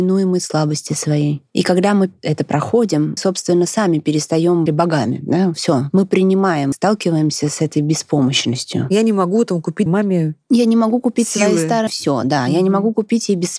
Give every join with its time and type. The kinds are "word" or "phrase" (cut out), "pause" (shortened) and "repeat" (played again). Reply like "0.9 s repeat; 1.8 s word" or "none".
3.2 s word; 4.7 s phrase; 6.7 s word; 9.9 s phrase; 11.9 s word